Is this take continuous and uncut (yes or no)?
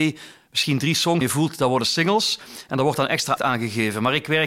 no